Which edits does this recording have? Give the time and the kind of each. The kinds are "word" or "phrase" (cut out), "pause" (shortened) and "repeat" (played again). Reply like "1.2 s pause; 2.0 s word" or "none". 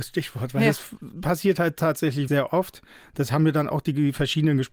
2.3 s word